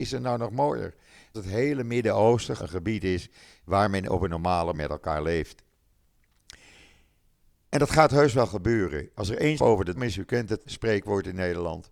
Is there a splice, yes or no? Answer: yes